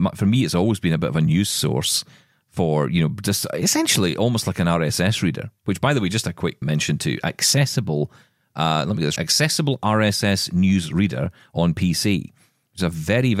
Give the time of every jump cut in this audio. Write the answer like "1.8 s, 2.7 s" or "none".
6.6 s, 9.2 s